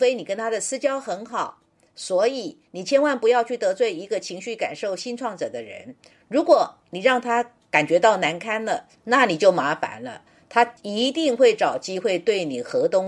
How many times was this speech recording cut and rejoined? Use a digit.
0